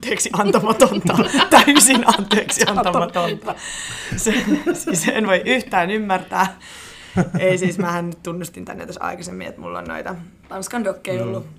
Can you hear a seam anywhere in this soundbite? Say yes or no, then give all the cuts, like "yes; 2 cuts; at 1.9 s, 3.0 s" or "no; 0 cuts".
yes; 1 cut; at 10.4 s